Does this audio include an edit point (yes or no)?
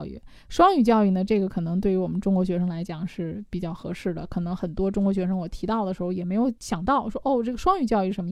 yes